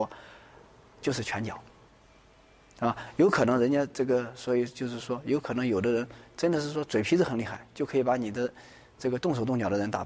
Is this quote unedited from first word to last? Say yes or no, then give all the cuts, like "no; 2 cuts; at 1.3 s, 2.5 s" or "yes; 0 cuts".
yes; 0 cuts